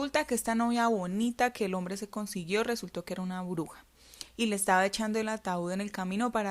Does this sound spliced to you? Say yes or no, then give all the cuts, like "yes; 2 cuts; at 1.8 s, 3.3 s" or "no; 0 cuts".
no; 0 cuts